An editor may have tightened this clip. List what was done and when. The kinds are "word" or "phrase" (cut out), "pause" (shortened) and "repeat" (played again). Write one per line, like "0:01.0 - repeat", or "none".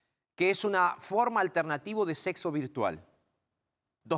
none